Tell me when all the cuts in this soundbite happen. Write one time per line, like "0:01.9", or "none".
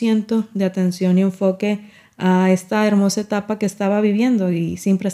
none